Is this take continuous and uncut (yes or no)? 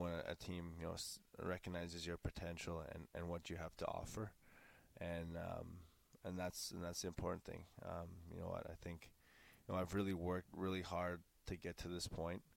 yes